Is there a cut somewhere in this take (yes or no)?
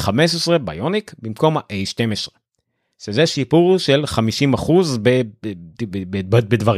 no